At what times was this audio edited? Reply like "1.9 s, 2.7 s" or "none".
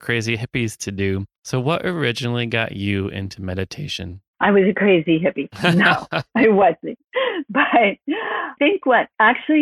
8.6 s

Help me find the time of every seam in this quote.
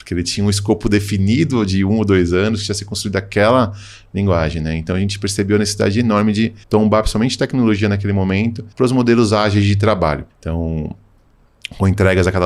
6.6 s, 8.7 s, 10.3 s

